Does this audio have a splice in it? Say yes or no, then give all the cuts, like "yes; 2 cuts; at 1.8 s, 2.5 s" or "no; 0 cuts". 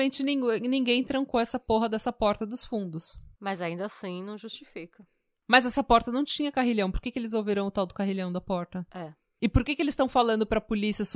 no; 0 cuts